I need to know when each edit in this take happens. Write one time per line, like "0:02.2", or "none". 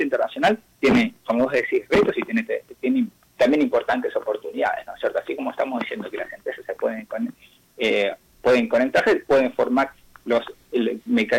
none